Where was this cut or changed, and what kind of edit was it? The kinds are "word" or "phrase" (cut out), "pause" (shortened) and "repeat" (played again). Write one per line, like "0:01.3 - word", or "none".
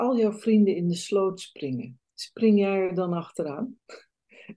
0:02.1 - pause